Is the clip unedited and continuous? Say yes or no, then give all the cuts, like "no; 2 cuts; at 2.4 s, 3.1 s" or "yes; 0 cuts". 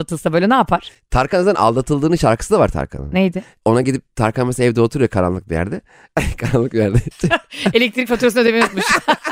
yes; 0 cuts